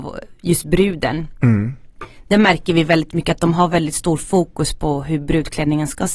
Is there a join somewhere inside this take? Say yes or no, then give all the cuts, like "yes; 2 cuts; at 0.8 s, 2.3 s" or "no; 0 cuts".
no; 0 cuts